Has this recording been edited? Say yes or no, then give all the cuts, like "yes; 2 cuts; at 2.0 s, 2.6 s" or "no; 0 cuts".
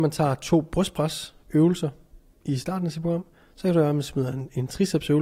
no; 0 cuts